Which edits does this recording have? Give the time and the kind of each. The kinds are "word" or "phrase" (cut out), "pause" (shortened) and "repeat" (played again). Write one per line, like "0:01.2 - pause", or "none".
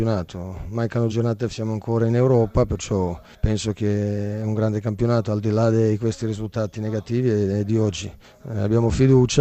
0:01.1 - word
0:01.5 - word